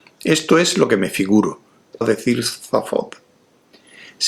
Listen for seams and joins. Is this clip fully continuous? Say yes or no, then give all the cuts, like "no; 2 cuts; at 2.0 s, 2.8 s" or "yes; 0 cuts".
no; 1 cut; at 2.0 s